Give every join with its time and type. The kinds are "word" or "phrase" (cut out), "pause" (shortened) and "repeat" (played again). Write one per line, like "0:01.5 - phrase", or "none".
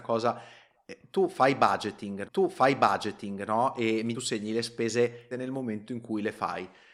0:02.2 - repeat
0:04.1 - phrase
0:05.3 - word